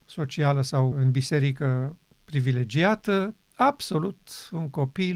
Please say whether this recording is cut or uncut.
cut